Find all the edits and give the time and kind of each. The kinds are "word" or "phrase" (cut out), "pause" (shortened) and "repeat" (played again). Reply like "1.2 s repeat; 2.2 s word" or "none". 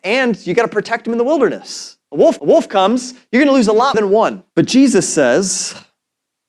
2.0 s pause; 2.4 s repeat; 3.9 s word; 4.5 s pause